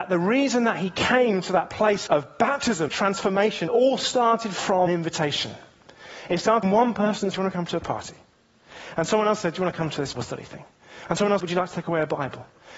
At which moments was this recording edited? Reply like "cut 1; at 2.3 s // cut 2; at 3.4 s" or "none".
cut 1; at 2.1 s // cut 2; at 2.9 s // cut 3; at 3.7 s // cut 4; at 4.9 s // cut 5; at 6.6 s // cut 6; at 7.3 s // cut 7; at 10.1 s // cut 8; at 11.4 s

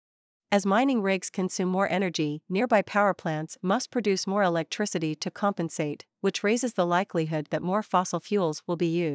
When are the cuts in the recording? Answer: none

